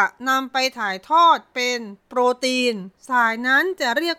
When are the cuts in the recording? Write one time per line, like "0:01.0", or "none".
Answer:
0:02.0
0:03.0